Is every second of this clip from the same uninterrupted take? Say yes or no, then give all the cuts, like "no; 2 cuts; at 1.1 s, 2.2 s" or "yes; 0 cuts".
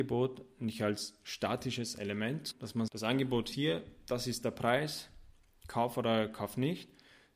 no; 3 cuts; at 2.5 s, 2.9 s, 3.5 s